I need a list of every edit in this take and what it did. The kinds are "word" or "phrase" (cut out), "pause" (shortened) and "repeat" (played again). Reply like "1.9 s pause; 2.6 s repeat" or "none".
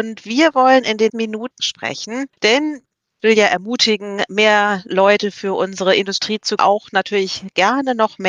1.1 s word; 1.6 s phrase; 3.2 s phrase; 6.6 s word